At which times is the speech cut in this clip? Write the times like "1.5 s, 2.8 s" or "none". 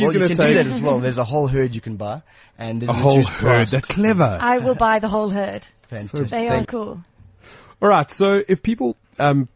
3.8 s, 6.6 s